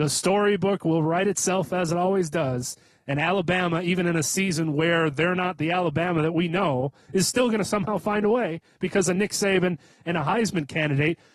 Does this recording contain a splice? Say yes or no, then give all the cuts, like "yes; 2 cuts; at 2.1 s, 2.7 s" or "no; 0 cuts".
no; 0 cuts